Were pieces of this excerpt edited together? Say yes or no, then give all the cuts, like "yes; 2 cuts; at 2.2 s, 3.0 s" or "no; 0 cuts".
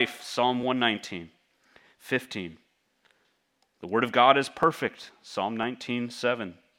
no; 0 cuts